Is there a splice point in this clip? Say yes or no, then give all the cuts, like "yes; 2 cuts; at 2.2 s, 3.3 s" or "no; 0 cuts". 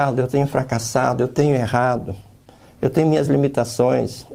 no; 0 cuts